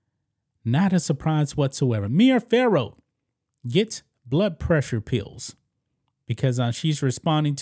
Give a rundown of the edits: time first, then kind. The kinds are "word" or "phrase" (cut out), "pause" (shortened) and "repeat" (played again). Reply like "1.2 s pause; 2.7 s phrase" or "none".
none